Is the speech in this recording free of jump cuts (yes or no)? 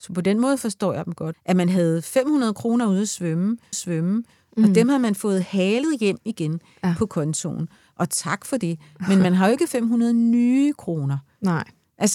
no